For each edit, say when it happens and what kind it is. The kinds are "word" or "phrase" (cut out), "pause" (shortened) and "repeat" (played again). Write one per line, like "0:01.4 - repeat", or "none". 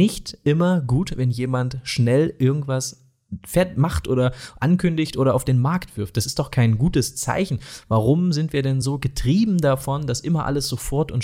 none